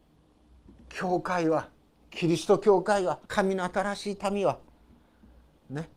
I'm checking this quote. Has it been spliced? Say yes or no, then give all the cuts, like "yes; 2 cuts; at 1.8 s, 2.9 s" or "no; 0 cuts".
yes; 1 cut; at 3.2 s